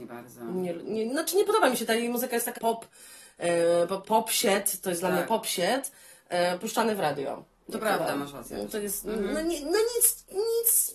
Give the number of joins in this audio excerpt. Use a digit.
2